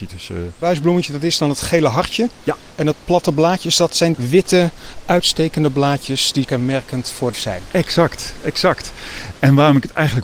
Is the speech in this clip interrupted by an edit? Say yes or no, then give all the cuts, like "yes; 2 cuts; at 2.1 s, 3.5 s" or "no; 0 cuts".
yes; 3 cuts; at 4.1 s, 6.4 s, 7.3 s